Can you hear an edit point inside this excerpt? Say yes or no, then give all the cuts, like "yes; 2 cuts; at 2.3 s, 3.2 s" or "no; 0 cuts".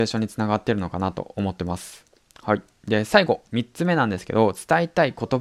no; 0 cuts